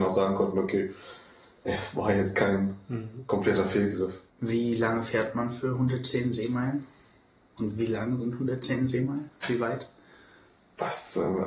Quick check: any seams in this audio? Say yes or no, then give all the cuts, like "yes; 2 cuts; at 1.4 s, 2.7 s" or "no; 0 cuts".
yes; 1 cut; at 4.3 s